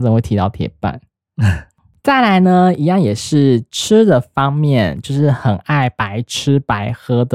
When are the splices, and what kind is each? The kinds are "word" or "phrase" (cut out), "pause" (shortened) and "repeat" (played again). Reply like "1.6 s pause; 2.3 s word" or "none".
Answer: none